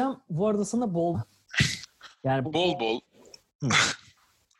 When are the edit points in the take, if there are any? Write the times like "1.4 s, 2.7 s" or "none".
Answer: 1.1 s, 2.4 s